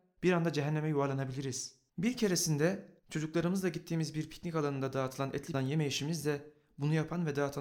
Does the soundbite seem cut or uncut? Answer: cut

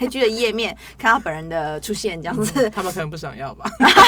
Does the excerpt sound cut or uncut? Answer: uncut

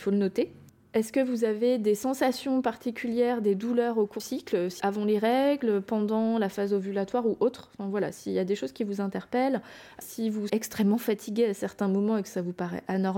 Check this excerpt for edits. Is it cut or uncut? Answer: cut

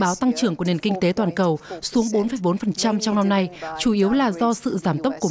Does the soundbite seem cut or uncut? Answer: uncut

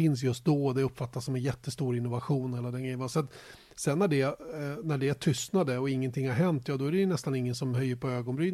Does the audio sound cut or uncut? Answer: uncut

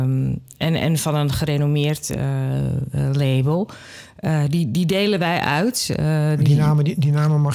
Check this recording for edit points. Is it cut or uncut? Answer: uncut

